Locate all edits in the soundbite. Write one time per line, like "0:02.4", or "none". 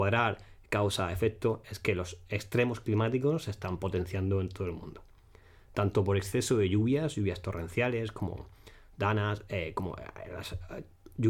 none